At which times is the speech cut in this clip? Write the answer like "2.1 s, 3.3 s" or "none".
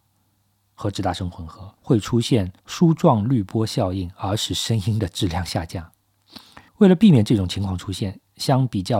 1.8 s, 2.6 s, 6.7 s

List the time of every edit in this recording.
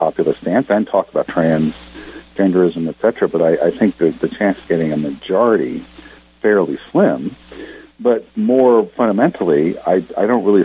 1.3 s, 4.7 s, 8.3 s

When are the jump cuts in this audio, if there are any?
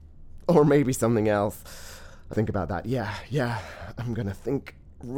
2.3 s

